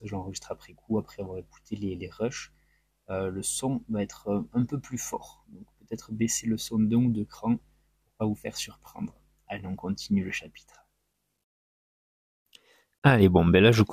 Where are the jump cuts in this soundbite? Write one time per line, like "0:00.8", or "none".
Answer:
none